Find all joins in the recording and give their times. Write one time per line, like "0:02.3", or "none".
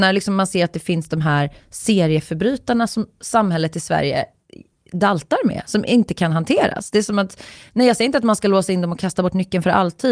none